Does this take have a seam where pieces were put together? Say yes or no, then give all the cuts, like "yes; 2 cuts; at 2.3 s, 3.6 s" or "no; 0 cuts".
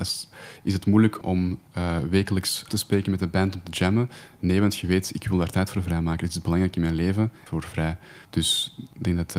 yes; 5 cuts; at 1.2 s, 1.7 s, 2.7 s, 7.5 s, 8.2 s